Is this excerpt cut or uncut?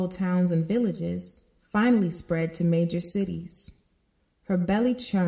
uncut